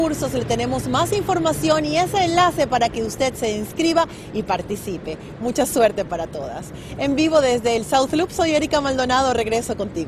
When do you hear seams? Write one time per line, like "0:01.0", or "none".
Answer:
none